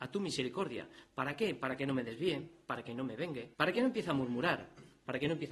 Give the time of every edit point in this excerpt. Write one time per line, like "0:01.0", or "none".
0:03.5